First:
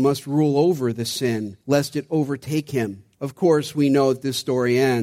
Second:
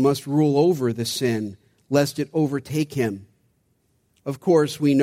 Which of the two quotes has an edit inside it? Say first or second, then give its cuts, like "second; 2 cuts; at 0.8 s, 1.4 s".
first; 2 cuts; at 1.6 s, 3.1 s